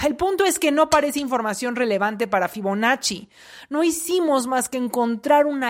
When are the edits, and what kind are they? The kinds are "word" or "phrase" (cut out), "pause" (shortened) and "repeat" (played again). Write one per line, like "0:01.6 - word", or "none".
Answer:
none